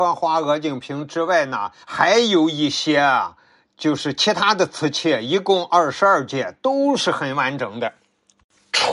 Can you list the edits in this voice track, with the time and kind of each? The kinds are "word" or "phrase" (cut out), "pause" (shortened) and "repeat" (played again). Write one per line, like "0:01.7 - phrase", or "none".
0:01.8 - pause